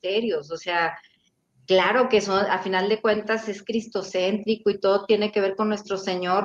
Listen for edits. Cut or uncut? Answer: uncut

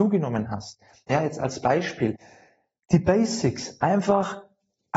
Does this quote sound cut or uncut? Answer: uncut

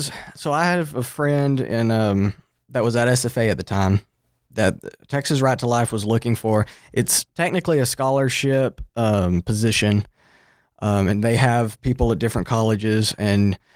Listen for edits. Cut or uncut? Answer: uncut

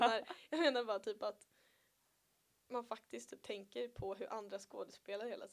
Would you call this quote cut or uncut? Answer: uncut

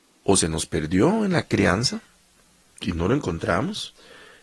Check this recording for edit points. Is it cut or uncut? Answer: uncut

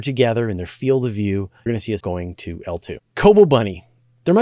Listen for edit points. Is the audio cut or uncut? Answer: cut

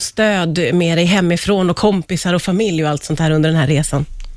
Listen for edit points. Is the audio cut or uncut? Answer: uncut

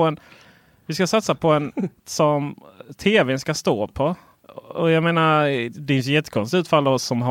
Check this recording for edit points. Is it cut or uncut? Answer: cut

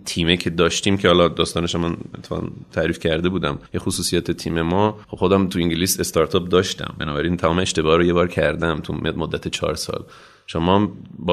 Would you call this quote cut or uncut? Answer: cut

